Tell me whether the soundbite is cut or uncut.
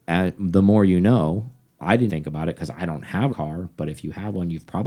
cut